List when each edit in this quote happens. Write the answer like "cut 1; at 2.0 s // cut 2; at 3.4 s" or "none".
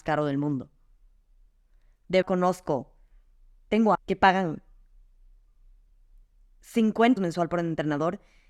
cut 1; at 2.2 s // cut 2; at 3.9 s // cut 3; at 7.2 s